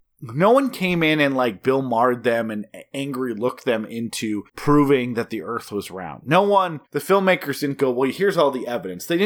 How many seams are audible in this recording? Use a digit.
2